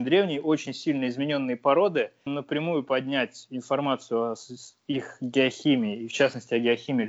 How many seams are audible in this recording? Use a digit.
1